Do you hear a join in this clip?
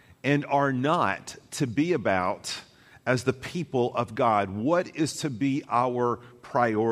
no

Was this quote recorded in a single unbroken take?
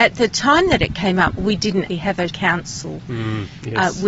no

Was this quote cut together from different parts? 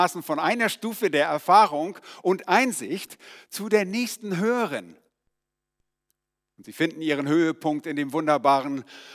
no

